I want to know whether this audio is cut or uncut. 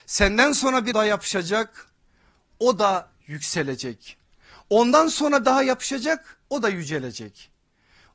cut